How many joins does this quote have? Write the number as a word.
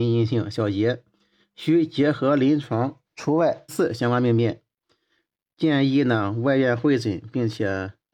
two